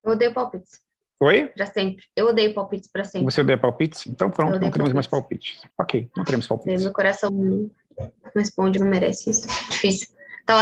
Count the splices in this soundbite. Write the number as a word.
five